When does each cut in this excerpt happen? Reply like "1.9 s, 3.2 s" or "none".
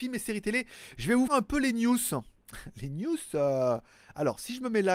1.3 s